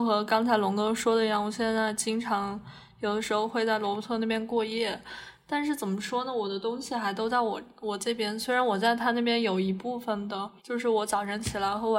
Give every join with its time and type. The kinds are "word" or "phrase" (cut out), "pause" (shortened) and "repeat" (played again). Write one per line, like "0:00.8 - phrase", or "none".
0:10.6 - pause